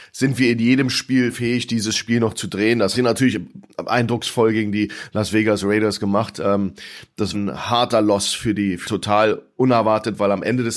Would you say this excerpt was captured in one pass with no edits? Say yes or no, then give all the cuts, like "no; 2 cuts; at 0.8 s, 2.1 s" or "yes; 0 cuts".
no; 3 cuts; at 2.9 s, 7.3 s, 8.8 s